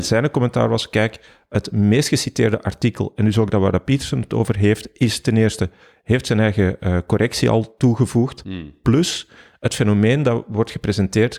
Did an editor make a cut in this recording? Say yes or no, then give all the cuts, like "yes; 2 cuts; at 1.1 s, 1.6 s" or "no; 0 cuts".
no; 0 cuts